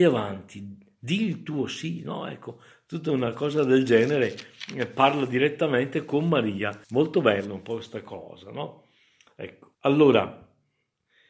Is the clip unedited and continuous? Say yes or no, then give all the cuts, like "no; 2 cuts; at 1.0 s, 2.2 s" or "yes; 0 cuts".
no; 2 cuts; at 6.8 s, 9.7 s